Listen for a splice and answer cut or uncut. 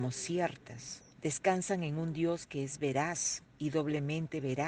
cut